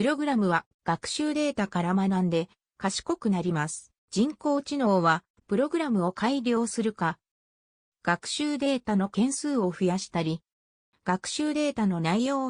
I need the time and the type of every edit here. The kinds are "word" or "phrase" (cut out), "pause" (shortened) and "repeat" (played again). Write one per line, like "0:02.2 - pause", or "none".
0:04.0 - pause